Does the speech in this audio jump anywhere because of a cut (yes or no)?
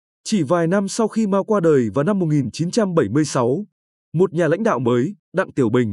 no